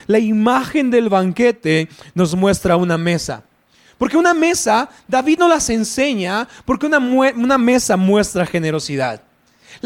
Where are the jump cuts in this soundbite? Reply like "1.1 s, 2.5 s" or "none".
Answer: none